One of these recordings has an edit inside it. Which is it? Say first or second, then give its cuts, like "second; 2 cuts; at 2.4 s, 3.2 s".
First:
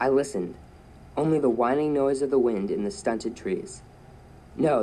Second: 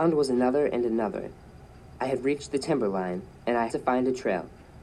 second; 1 cut; at 3.7 s